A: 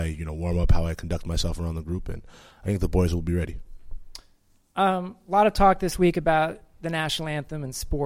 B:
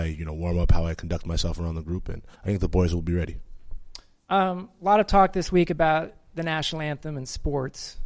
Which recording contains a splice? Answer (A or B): B